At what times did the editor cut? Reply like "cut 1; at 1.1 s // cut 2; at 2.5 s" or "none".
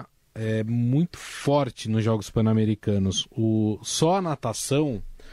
none